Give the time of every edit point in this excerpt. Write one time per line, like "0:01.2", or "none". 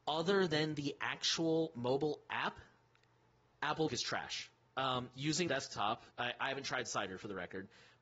0:03.9
0:04.7
0:05.5
0:06.1